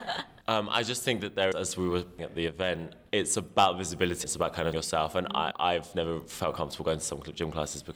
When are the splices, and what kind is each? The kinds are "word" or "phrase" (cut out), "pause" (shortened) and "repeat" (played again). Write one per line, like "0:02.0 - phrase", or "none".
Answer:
0:01.5 - word
0:02.2 - word
0:04.2 - word
0:04.7 - word
0:05.5 - word